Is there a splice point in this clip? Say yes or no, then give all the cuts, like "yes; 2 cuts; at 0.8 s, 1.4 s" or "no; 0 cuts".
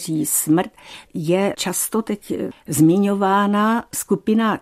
yes; 2 cuts; at 1.1 s, 1.5 s